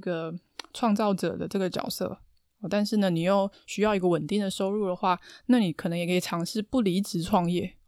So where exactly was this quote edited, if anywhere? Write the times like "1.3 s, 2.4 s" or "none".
none